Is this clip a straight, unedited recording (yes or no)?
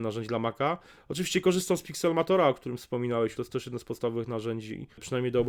no